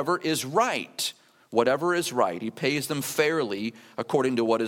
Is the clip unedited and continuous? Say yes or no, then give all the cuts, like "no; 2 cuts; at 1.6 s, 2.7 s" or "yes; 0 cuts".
yes; 0 cuts